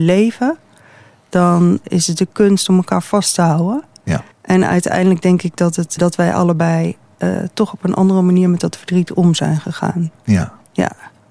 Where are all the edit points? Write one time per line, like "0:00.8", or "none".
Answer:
0:01.8
0:04.3
0:06.0

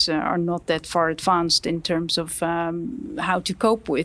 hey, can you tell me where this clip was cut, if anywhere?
none

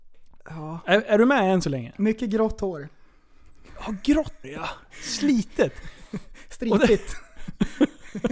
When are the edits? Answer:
0:04.4

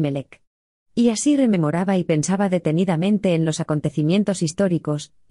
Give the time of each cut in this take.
none

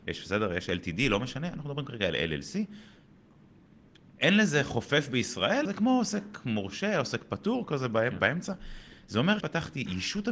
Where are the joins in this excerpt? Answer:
0:05.6
0:09.4

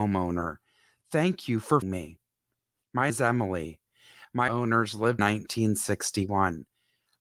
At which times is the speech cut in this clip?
0:01.8
0:03.1
0:04.5
0:05.2

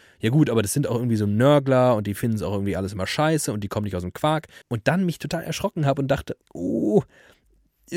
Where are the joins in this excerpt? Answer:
0:04.6
0:06.4

